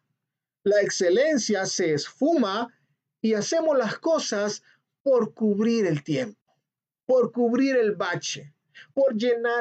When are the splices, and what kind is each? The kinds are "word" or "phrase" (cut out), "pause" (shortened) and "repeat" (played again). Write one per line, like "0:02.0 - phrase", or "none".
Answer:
none